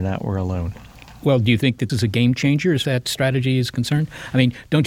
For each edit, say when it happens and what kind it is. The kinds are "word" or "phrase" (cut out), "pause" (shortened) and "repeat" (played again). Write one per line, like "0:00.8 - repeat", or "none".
0:01.9 - word
0:02.8 - phrase

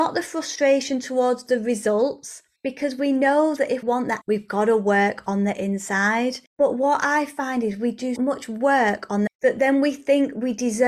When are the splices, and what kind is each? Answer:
0:02.6 - pause
0:03.8 - word
0:04.2 - phrase
0:06.5 - pause
0:08.2 - word
0:09.3 - phrase

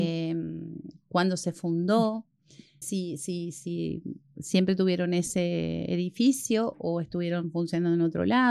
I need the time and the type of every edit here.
0:02.8 - word

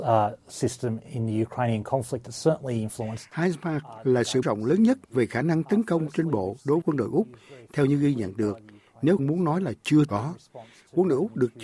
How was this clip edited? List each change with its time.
0:04.4 - word
0:06.8 - word
0:09.2 - word
0:10.1 - word

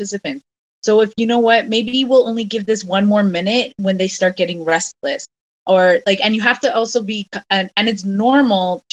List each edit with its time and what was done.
none

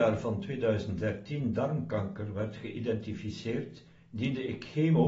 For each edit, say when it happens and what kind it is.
0:04.0 - pause

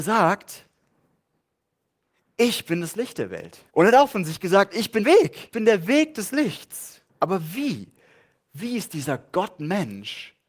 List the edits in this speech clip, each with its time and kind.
0:03.7 - pause
0:05.0 - word
0:05.5 - word
0:07.1 - pause

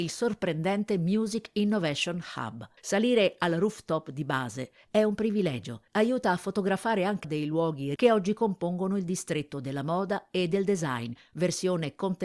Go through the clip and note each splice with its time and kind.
0:02.8 - pause
0:05.9 - pause
0:07.2 - phrase
0:08.0 - word

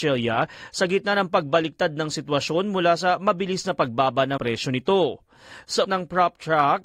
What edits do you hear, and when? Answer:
0:04.4 - word
0:05.8 - word

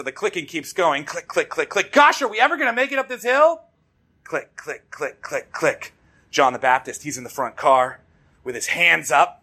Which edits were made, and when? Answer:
0:01.3 - word
0:03.9 - pause

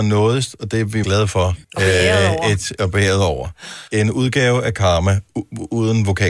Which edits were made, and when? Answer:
0:01.0 - word
0:01.6 - pause
0:03.9 - pause

